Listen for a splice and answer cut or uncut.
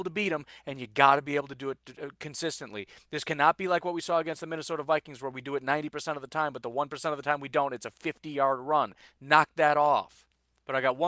uncut